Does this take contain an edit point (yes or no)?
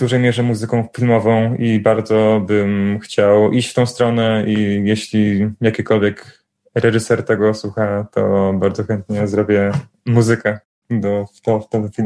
no